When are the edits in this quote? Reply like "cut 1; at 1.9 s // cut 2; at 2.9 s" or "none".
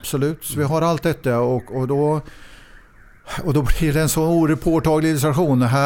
none